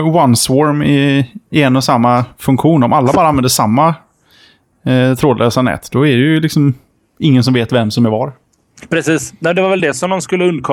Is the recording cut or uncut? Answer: uncut